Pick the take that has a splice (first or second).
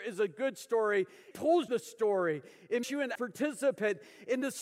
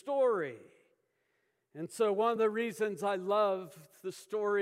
first